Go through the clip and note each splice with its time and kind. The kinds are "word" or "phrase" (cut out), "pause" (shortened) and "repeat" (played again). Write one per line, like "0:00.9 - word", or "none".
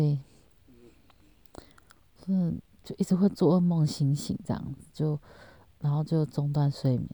none